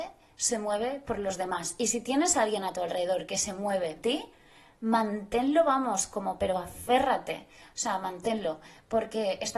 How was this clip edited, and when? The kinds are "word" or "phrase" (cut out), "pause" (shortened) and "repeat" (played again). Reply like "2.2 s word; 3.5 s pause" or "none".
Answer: 4.0 s word